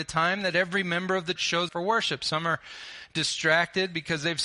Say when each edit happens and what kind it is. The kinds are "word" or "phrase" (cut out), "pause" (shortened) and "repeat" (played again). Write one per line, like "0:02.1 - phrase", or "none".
0:01.4 - word
0:01.7 - word